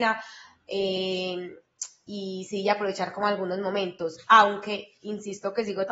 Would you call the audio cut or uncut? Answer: uncut